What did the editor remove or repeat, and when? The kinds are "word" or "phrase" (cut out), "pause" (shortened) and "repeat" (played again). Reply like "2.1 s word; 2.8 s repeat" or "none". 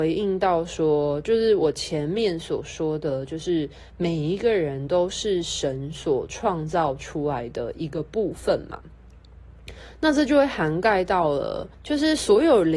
11.7 s pause